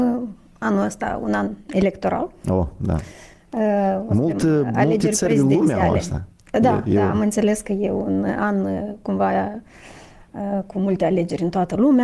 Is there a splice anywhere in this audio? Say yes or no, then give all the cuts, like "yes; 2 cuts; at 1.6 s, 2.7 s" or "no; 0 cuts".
no; 0 cuts